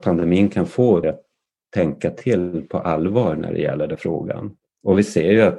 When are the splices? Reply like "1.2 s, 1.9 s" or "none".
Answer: 1.0 s, 4.0 s